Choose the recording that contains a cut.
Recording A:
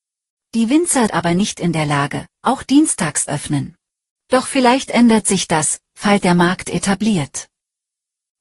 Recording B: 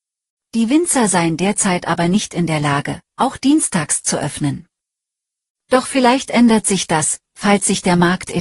A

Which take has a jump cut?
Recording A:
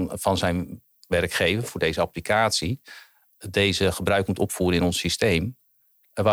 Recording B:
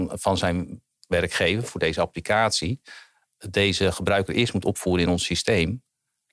A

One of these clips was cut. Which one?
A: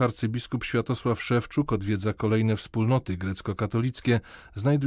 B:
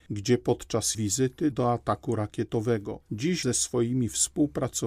B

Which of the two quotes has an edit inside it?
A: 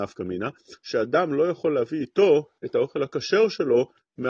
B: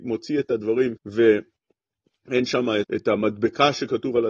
B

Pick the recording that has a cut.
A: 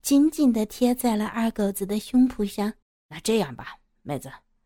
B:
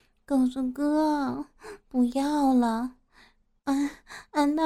A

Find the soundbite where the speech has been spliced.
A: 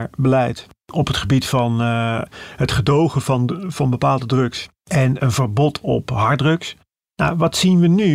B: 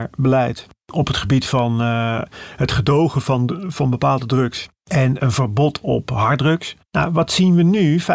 B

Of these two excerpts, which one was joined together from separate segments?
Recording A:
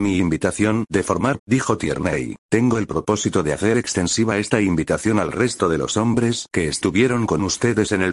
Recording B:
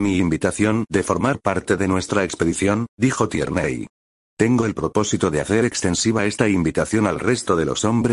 A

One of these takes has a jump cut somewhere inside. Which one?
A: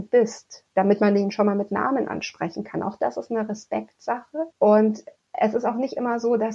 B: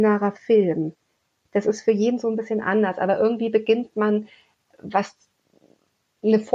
A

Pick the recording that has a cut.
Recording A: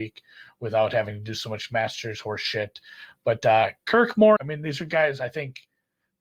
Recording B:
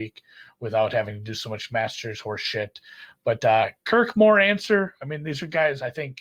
A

